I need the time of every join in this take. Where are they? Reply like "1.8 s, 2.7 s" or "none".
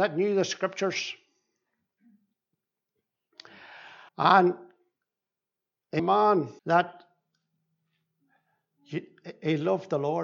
4.1 s, 6.0 s, 6.6 s